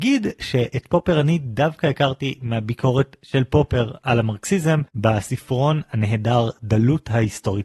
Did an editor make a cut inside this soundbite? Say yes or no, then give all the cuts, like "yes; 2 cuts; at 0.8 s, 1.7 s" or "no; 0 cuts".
yes; 1 cut; at 4.9 s